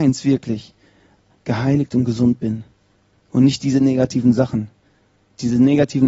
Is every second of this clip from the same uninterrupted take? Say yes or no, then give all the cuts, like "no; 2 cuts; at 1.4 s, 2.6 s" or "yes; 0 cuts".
yes; 0 cuts